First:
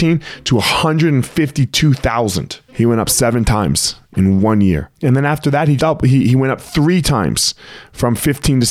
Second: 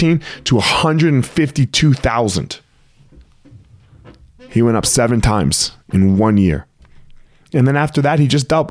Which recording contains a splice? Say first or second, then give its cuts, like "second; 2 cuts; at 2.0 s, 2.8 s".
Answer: first; 3 cuts; at 2.7 s, 5.0 s, 5.8 s